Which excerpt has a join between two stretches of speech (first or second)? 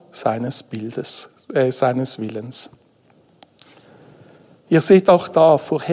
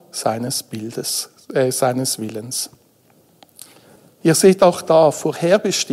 second